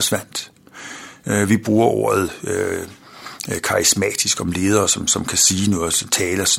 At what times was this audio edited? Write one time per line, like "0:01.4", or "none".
none